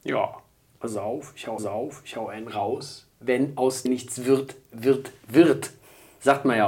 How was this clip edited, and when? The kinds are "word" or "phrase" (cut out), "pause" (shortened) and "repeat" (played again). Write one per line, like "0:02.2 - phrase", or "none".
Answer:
0:01.6 - repeat
0:03.9 - word